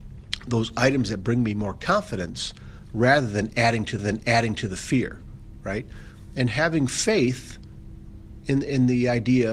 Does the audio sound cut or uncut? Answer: cut